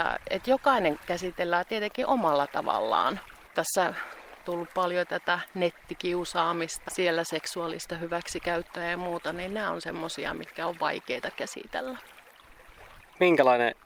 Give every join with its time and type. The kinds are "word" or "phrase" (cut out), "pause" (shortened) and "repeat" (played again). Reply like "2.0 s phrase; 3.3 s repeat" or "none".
4.4 s word; 6.9 s word